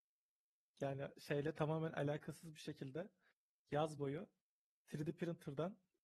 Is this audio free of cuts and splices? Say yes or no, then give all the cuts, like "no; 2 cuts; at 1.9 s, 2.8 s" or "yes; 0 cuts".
yes; 0 cuts